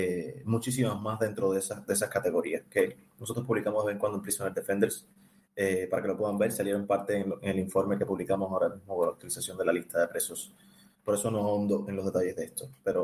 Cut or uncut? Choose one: uncut